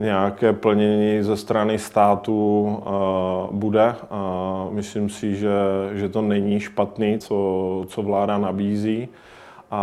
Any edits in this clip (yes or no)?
yes